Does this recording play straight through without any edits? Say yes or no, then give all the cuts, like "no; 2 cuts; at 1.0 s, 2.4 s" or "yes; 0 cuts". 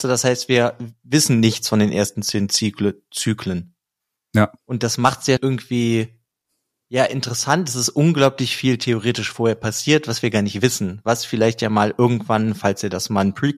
no; 2 cuts; at 4.6 s, 5.4 s